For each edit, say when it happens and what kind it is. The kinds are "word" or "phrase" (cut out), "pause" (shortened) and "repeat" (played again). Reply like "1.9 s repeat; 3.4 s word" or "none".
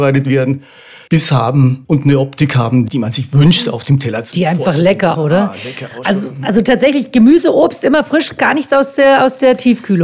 5.1 s phrase